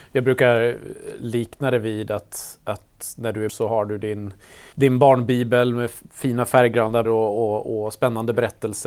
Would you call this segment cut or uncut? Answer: cut